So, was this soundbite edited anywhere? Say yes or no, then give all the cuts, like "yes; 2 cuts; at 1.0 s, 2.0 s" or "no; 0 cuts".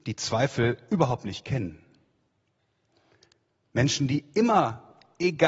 no; 0 cuts